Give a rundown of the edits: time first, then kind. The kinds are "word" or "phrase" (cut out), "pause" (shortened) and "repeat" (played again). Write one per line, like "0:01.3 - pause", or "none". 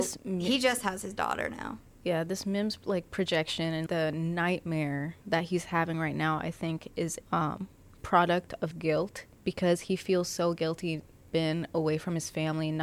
0:03.9 - word
0:05.2 - pause
0:07.2 - word
0:08.7 - word
0:09.3 - pause
0:11.3 - phrase